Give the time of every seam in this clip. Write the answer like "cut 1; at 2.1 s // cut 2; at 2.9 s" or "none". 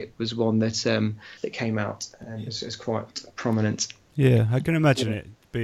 cut 1; at 1.4 s